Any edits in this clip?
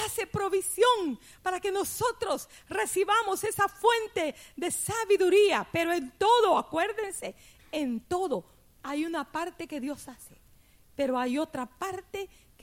no; 0 cuts

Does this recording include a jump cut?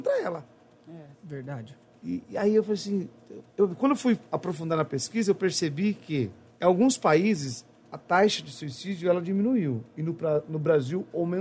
yes; 4 cuts; at 1.1 s, 3.5 s, 4.3 s, 6.5 s

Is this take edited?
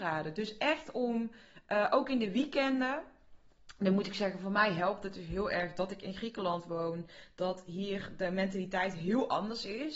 no; 0 cuts

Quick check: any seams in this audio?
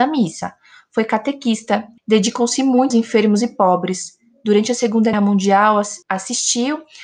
yes; 4 cuts; at 2.0 s, 2.9 s, 5.1 s, 6.0 s

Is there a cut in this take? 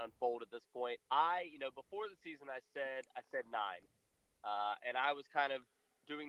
yes; 1 cut; at 1.1 s

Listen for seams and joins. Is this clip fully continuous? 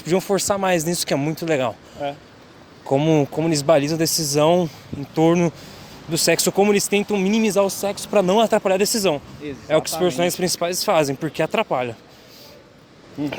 yes; 0 cuts

